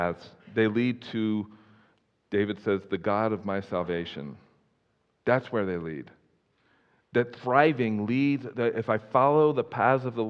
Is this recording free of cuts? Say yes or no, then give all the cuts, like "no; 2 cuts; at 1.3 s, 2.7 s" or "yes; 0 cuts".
yes; 0 cuts